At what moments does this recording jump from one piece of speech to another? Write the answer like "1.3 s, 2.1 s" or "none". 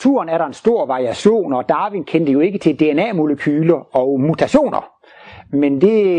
none